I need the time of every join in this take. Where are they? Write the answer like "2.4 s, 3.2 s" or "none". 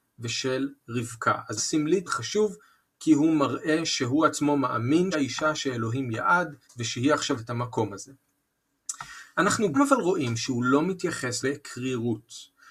1.6 s, 2.1 s, 5.1 s, 6.6 s, 7.4 s, 9.7 s, 11.4 s